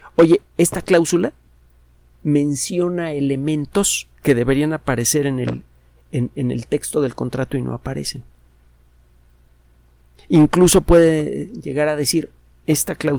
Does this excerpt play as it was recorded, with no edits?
yes; 0 cuts

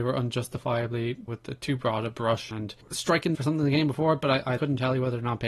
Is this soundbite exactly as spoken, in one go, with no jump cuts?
no; 4 cuts; at 1.3 s, 2.5 s, 3.3 s, 4.6 s

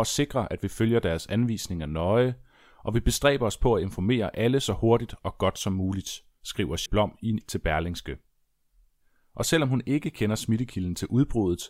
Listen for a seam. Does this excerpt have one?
yes; 2 cuts; at 6.9 s, 7.4 s

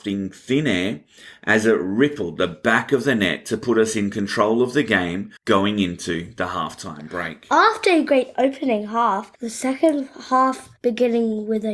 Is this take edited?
yes; 3 cuts; at 5.4 s, 9.4 s, 10.8 s

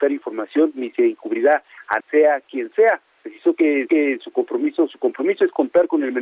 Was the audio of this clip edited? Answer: yes; 3 cuts; at 2.0 s, 3.1 s, 3.9 s

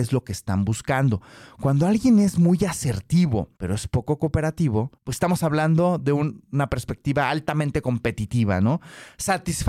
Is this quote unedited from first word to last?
no; 2 cuts; at 3.6 s, 5.0 s

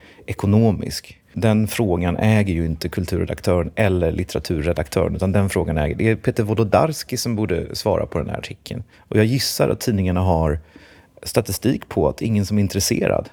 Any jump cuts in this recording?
yes; 2 cuts; at 1.2 s, 8.9 s

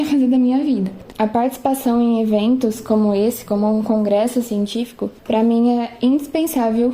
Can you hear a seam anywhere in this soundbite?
yes; 1 cut; at 1.1 s

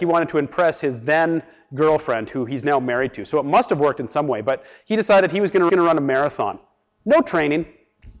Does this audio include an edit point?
yes; 1 cut; at 5.7 s

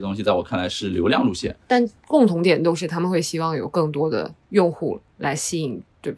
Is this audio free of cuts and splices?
no; 1 cut; at 4.4 s

